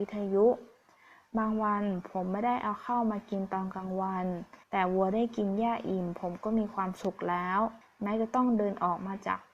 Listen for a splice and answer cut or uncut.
cut